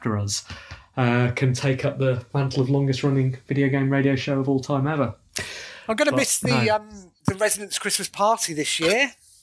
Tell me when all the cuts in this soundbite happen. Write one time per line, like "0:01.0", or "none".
0:07.2